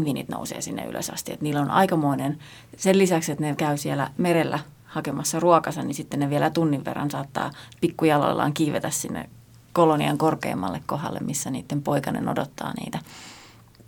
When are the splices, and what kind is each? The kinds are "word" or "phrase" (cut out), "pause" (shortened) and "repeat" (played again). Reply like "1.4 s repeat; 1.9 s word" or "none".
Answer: none